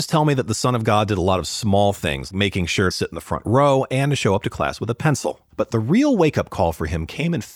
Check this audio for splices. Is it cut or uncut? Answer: cut